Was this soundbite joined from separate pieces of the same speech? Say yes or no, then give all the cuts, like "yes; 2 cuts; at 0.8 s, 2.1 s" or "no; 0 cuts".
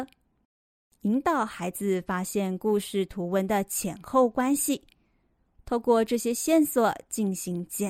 no; 0 cuts